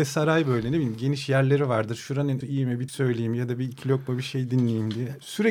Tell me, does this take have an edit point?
yes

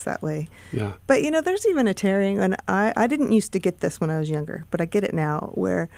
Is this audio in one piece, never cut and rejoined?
yes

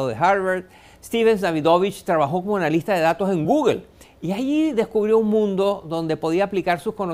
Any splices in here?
no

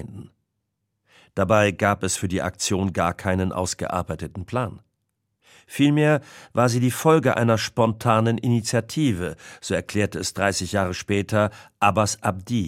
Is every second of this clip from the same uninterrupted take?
yes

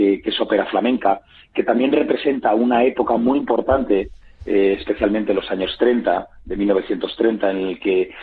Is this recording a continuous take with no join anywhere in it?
yes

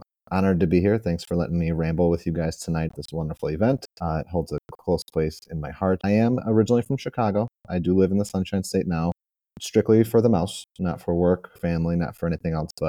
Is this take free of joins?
no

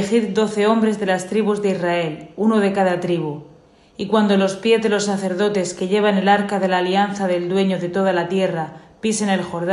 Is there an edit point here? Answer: no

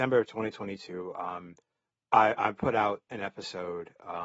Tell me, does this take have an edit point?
no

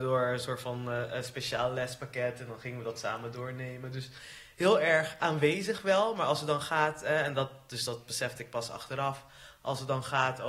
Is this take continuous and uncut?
yes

